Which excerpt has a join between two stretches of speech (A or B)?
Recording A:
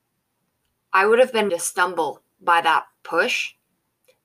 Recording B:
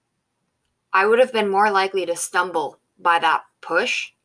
A